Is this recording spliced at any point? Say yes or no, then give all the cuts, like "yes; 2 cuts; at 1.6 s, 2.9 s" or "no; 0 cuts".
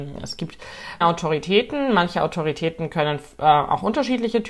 yes; 1 cut; at 1.0 s